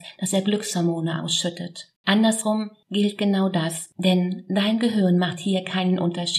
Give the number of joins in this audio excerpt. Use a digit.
1